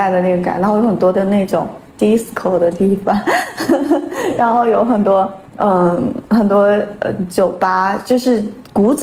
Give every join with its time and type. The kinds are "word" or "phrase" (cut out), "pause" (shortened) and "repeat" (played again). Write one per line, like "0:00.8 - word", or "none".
0:05.5 - pause